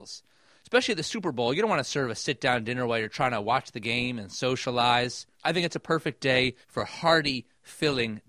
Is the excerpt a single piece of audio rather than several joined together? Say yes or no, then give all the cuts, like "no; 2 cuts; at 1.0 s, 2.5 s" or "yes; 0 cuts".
no; 2 cuts; at 5.3 s, 6.6 s